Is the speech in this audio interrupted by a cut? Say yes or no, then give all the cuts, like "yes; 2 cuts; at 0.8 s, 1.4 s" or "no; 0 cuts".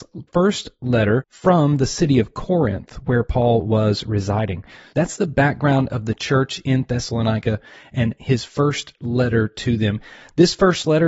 no; 0 cuts